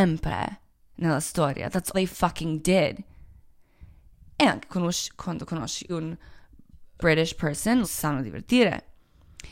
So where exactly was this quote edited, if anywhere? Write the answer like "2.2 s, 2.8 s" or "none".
1.9 s, 4.7 s, 5.9 s, 7.0 s, 7.8 s